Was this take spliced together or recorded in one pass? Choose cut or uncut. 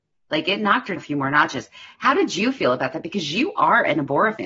cut